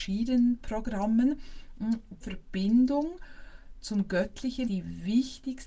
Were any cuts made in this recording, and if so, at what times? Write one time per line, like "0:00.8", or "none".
0:02.2
0:04.6